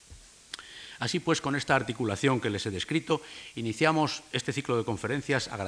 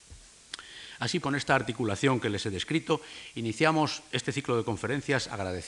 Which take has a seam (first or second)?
second